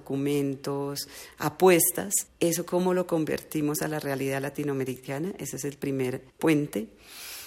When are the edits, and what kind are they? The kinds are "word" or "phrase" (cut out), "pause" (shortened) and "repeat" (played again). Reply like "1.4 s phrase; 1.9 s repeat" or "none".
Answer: 2.3 s pause; 6.3 s pause